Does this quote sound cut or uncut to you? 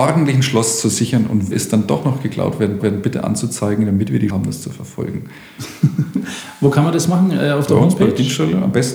cut